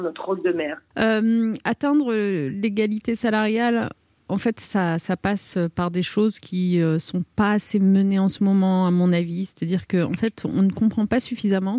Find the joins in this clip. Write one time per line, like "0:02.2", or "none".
none